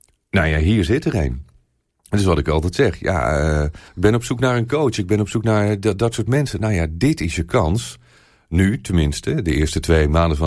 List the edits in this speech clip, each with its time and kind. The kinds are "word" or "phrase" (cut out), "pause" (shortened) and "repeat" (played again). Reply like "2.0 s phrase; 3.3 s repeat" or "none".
3.9 s pause